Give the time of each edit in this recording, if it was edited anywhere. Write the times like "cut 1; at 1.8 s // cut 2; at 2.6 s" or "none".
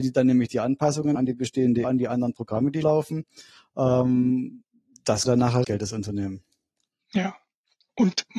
cut 1; at 1.1 s // cut 2; at 1.8 s // cut 3; at 2.8 s // cut 4; at 5.2 s // cut 5; at 5.6 s